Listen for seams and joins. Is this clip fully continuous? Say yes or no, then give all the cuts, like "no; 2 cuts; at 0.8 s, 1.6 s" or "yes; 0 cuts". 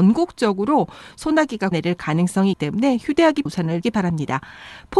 no; 4 cuts; at 1.7 s, 2.5 s, 3.5 s, 3.8 s